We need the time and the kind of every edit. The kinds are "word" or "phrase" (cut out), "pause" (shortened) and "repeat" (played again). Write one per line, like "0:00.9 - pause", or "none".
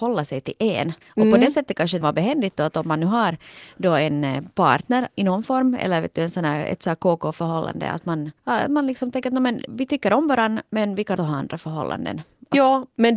0:01.0 - pause
0:02.0 - phrase
0:08.4 - pause
0:09.7 - word
0:11.2 - word